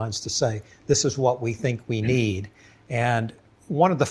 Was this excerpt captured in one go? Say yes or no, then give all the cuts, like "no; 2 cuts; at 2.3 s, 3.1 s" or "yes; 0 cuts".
yes; 0 cuts